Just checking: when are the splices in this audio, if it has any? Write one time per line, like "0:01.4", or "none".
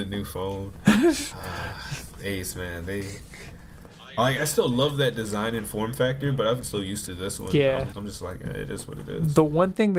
0:02.2
0:04.4
0:06.6
0:07.9